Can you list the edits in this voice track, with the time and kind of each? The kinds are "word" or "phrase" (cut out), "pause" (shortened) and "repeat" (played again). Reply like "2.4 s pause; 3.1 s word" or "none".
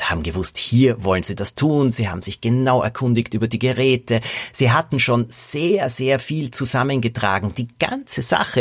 none